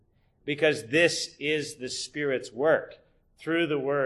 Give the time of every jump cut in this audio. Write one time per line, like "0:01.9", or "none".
none